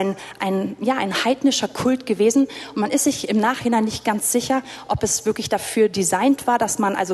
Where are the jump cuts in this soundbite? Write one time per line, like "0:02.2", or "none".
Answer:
none